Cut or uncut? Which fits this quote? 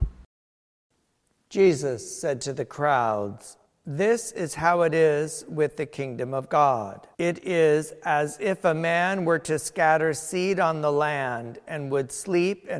cut